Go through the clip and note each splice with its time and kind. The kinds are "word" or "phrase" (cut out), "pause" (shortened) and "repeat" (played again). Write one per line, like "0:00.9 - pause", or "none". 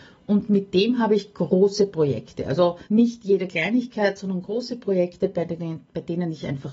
0:02.9 - pause